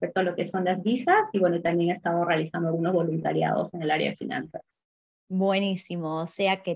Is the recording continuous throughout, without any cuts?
yes; 0 cuts

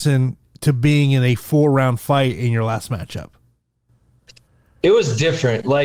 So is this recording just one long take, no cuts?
yes; 0 cuts

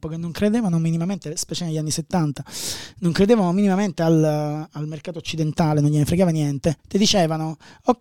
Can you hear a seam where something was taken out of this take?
yes; 1 cut; at 6.8 s

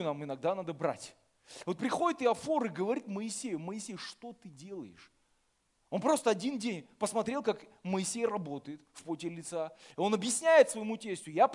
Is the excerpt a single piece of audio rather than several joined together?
yes; 0 cuts

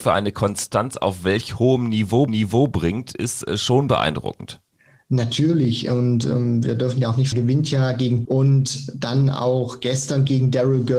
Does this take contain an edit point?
yes; 4 cuts; at 2.3 s, 4.7 s, 7.3 s, 8.2 s

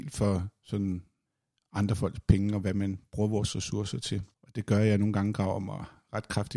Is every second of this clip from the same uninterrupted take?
no; 2 cuts; at 1.3 s, 4.3 s

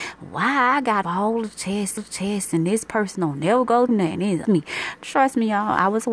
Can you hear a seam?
yes; 4 cuts; at 1.0 s, 2.0 s, 3.9 s, 4.4 s

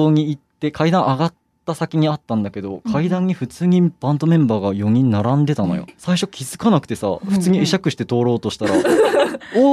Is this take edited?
yes; 1 cut; at 5.9 s

